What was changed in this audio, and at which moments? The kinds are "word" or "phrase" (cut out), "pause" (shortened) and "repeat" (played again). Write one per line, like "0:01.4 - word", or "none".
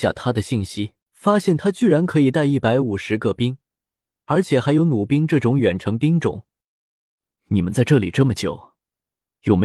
0:01.0 - pause